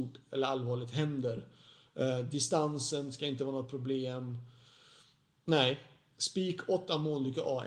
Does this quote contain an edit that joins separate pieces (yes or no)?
no